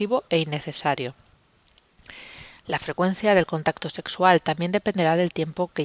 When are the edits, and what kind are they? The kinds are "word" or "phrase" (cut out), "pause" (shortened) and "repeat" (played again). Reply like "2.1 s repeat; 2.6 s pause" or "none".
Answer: none